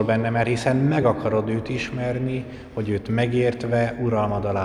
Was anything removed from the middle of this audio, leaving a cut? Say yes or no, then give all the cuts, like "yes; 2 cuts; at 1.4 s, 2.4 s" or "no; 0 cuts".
no; 0 cuts